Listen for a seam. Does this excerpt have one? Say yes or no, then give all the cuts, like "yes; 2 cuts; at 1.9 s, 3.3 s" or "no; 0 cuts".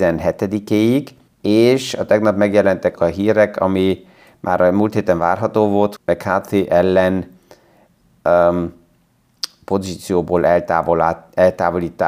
yes; 3 cuts; at 1.3 s, 3.0 s, 6.0 s